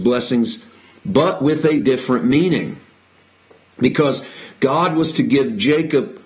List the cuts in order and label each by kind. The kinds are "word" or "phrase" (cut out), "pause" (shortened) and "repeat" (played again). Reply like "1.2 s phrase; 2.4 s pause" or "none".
1.8 s word